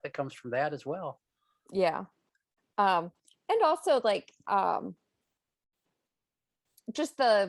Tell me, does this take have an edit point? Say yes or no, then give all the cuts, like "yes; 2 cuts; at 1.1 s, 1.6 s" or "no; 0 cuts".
no; 0 cuts